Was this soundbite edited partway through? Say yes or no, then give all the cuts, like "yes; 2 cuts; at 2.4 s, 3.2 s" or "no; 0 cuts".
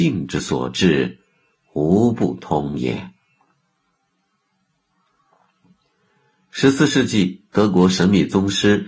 no; 0 cuts